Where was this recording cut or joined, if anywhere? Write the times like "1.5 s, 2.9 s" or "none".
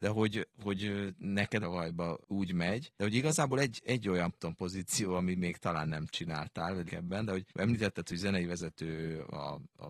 1.6 s, 2.2 s, 2.9 s, 4.3 s, 6.9 s, 7.5 s